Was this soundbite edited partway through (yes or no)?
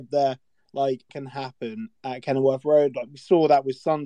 yes